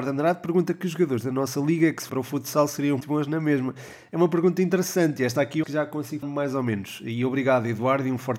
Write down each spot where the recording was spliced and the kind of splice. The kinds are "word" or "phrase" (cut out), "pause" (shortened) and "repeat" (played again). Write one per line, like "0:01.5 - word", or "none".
0:02.1 - word
0:03.0 - word
0:05.6 - word
0:06.2 - word

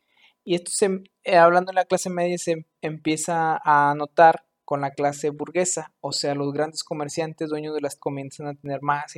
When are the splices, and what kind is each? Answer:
0:08.0 - word

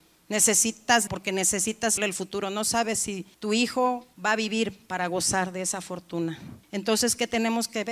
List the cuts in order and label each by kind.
0:01.1 - word
0:02.0 - word
0:03.3 - pause
0:04.1 - pause
0:06.6 - pause

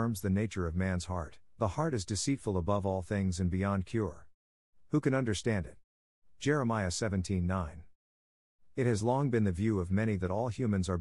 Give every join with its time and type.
none

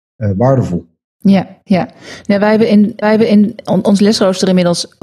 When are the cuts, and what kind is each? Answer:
0:03.0 - repeat

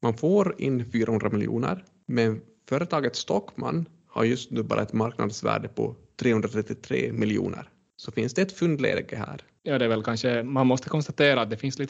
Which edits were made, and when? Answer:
none

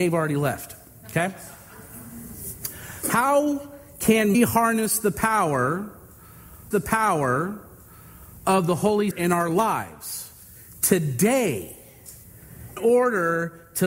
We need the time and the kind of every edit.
0:04.3 - word
0:06.7 - repeat
0:09.1 - word
0:12.8 - word

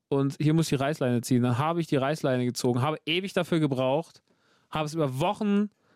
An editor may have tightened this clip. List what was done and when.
none

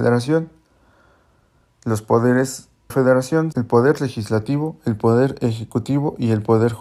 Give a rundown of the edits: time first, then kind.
0:02.9 - phrase
0:03.5 - word

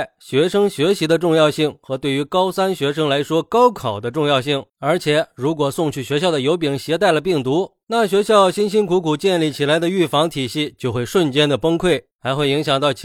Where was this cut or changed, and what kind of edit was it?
0:04.7 - pause

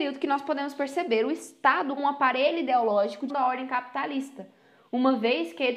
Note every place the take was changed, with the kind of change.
0:02.0 - word
0:03.3 - word

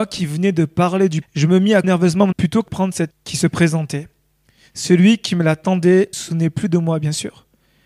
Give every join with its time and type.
0:01.2 - word
0:01.8 - word
0:02.3 - word
0:02.7 - word
0:03.1 - word
0:06.1 - word

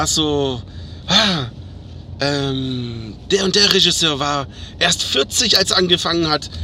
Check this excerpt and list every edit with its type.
none

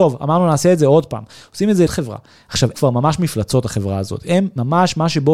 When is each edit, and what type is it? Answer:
0:01.9 - word
0:02.7 - word

